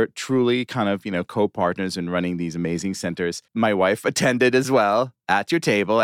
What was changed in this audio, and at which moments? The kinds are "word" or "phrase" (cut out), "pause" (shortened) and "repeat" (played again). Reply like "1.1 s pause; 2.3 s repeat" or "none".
3.5 s pause

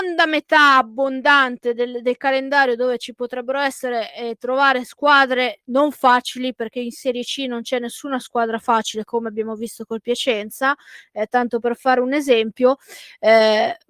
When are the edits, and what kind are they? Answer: none

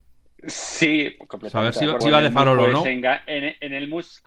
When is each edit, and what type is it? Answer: 2.0 s phrase

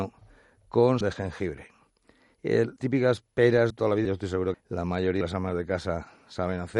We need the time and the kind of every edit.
1.0 s word; 2.8 s word; 3.7 s word; 4.0 s word; 4.5 s word; 5.2 s word

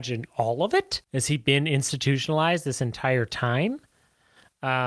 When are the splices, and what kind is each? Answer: 1.0 s pause

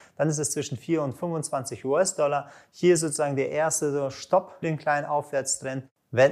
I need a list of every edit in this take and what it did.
4.6 s word

